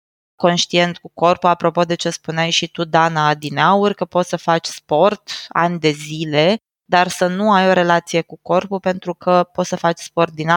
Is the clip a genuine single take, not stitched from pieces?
yes; 0 cuts

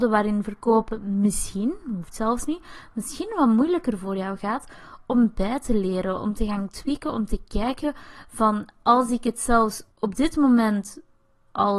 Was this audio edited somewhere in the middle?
yes; 1 cut; at 9.9 s

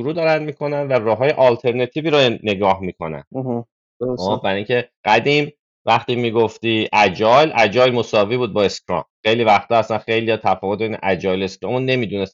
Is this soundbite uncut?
no; 3 cuts; at 3.3 s, 4.9 s, 9.1 s

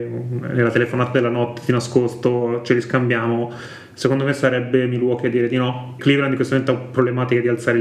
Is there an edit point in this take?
yes; 1 cut; at 6.0 s

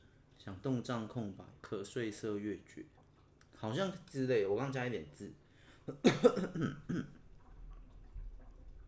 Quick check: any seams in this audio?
yes; 2 cuts; at 1.6 s, 3.0 s

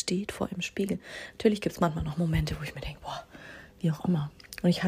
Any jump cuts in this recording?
no; 0 cuts

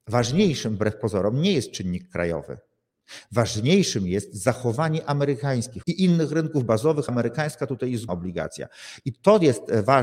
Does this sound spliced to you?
yes; 3 cuts; at 5.8 s, 7.1 s, 8.1 s

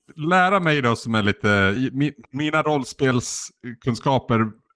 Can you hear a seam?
yes; 2 cuts; at 1.8 s, 2.2 s

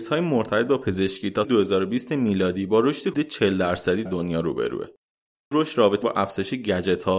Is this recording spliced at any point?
yes; 5 cuts; at 1.4 s, 3.1 s, 4.1 s, 5.5 s, 6.0 s

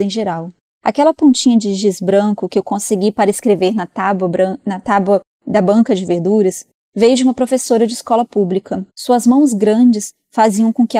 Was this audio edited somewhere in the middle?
yes; 1 cut; at 8.9 s

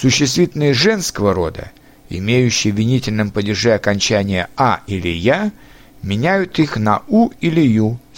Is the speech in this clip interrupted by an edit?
no; 0 cuts

